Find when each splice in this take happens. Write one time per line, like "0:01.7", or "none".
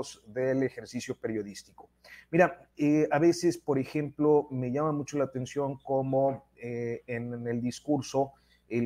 none